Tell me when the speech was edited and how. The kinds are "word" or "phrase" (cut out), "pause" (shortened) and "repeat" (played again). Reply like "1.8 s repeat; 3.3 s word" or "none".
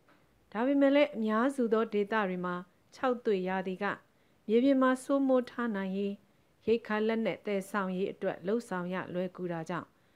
none